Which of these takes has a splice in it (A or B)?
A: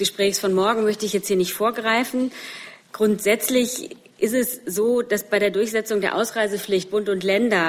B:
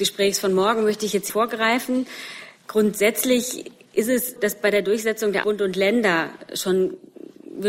B